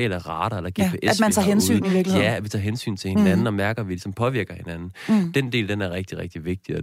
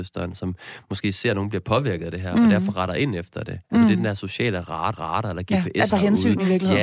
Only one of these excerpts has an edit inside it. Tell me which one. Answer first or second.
second